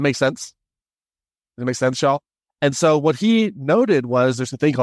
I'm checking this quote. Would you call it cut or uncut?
uncut